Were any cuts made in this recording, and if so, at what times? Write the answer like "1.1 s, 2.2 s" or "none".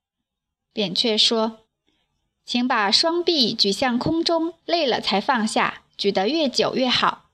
1.6 s, 4.6 s, 5.9 s

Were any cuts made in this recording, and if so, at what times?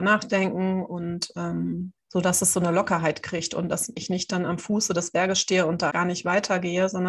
2.0 s, 5.9 s

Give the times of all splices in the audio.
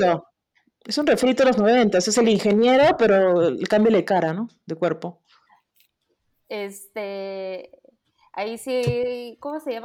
none

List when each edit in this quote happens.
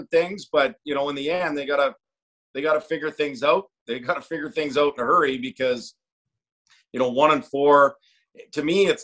none

